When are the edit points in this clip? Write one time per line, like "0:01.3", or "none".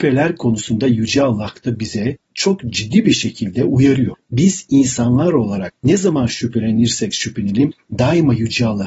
none